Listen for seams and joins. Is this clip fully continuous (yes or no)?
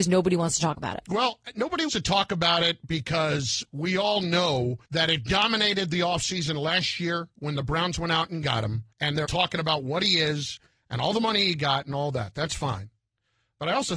no